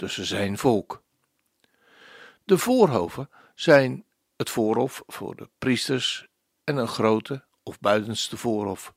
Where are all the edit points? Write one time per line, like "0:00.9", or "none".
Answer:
none